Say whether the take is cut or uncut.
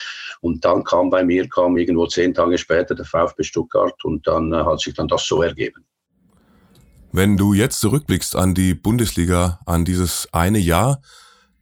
uncut